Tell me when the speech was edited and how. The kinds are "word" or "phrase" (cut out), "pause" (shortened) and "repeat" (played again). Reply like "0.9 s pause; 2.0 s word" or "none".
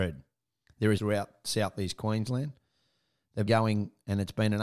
1.0 s word; 3.5 s word